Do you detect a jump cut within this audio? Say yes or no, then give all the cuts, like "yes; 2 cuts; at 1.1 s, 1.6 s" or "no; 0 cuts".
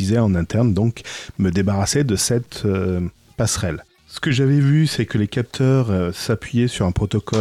no; 0 cuts